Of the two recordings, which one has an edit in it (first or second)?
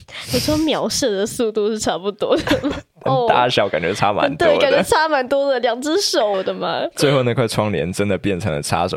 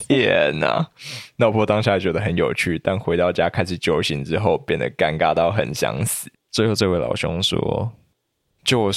first